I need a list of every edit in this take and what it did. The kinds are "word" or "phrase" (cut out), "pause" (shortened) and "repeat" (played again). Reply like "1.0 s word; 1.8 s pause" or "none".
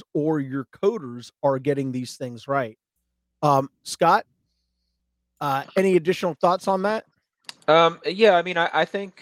none